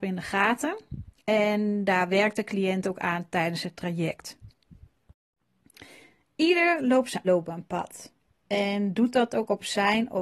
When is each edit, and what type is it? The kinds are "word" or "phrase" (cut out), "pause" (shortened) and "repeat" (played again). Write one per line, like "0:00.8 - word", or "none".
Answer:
0:07.2 - word